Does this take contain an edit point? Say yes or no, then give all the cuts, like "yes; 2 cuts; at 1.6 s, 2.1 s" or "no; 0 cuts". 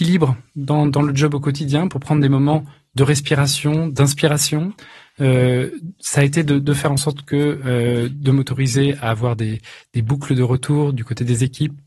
no; 0 cuts